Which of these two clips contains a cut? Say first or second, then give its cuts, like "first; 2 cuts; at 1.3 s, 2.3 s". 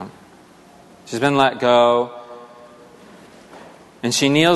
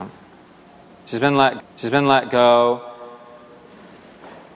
second; 1 cut; at 1.6 s